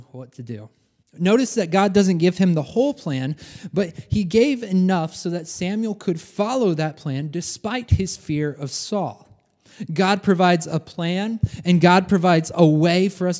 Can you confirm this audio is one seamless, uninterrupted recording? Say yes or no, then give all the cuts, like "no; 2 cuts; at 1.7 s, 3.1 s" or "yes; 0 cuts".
no; 1 cut; at 1.0 s